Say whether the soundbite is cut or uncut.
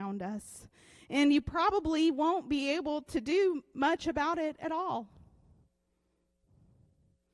uncut